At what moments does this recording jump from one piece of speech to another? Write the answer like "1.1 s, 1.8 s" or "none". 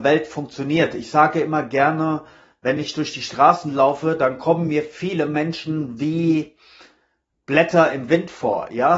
none